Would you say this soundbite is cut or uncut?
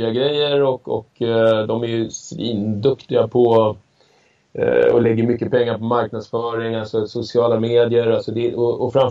uncut